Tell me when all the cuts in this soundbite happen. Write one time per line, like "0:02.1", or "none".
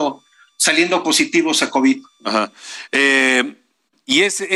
none